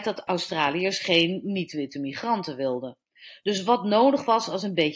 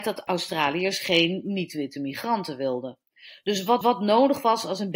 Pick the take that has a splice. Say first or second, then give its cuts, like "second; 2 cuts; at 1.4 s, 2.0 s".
second; 1 cut; at 3.8 s